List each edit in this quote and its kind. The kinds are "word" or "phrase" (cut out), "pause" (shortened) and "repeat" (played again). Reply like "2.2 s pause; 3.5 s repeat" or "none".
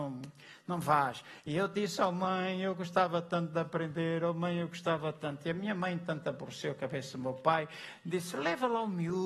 none